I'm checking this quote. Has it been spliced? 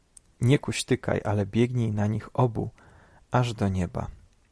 no; 0 cuts

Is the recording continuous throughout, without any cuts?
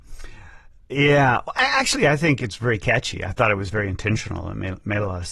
yes; 0 cuts

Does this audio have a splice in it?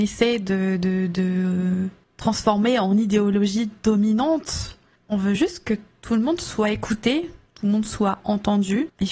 no; 0 cuts

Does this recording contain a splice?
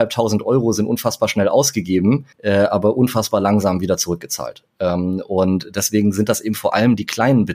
yes; 1 cut; at 2.3 s

